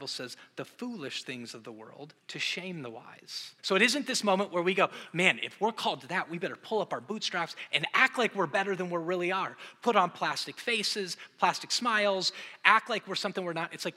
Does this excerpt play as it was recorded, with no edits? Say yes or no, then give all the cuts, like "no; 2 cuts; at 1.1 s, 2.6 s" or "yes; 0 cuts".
no; 2 cuts; at 2.2 s, 3.6 s